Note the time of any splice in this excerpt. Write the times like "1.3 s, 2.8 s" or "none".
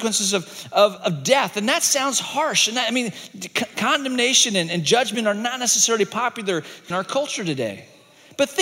1.0 s, 6.9 s